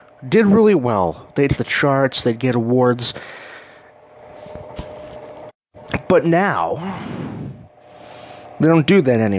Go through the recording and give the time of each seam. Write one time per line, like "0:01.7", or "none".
0:01.5